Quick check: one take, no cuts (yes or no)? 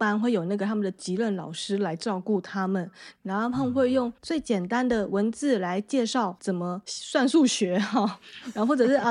no